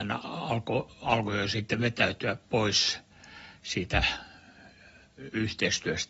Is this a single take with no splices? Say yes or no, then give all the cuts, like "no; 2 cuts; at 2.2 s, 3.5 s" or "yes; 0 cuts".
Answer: yes; 0 cuts